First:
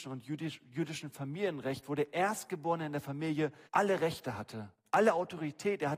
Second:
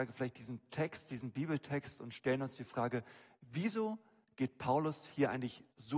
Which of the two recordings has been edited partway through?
first; 1 cut; at 3.7 s

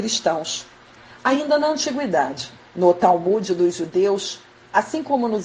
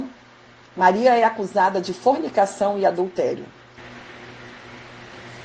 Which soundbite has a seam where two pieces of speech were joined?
first; 1 cut; at 2.6 s

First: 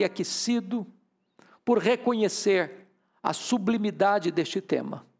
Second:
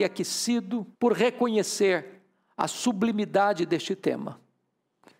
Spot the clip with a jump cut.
second; 1 cut; at 0.9 s

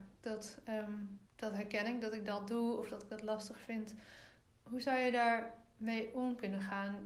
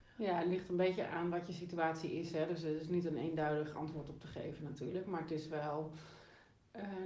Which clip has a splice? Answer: first; 2 cuts; at 1.3 s, 4.5 s

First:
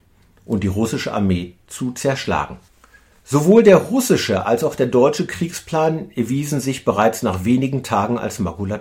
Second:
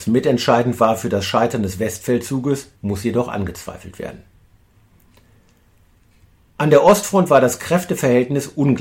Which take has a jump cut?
second; 1 cut; at 2.8 s

